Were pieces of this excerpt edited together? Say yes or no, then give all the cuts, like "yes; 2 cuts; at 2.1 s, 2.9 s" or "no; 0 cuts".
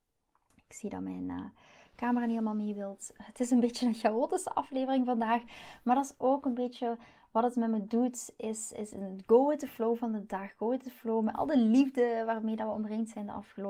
no; 0 cuts